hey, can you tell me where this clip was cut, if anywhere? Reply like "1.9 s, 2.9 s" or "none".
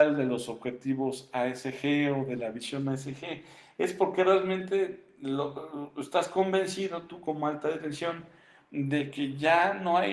none